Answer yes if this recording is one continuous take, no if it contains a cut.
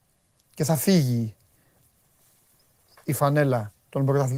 yes